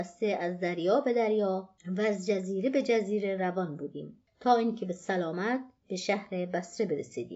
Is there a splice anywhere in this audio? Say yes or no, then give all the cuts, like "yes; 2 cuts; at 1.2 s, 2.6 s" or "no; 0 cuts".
yes; 1 cut; at 1.8 s